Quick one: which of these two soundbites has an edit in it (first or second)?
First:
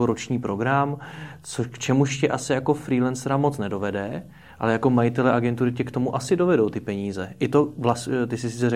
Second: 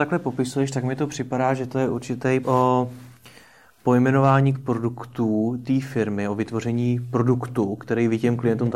second